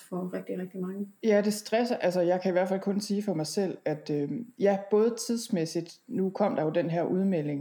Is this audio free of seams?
no; 1 cut; at 1.2 s

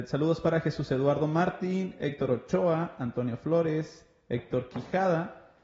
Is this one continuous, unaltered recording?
yes; 0 cuts

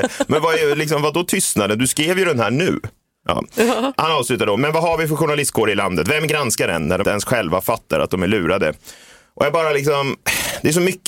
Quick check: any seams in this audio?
yes; 2 cuts; at 4.6 s, 7.0 s

